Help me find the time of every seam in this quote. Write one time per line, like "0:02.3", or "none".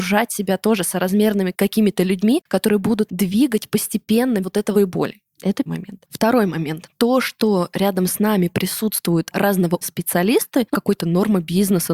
0:03.1
0:04.4
0:04.7
0:05.7
0:09.8
0:10.7

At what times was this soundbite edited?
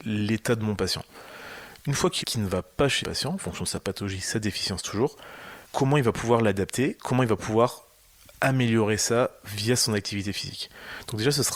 0:02.2
0:03.0
0:05.6

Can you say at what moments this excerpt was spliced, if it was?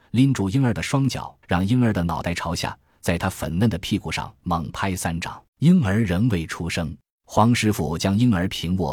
0:01.4
0:05.5
0:07.1

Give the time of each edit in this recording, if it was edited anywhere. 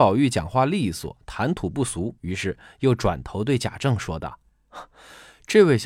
0:02.2

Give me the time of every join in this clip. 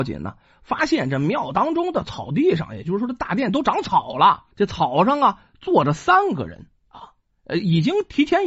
0:04.5
0:06.8

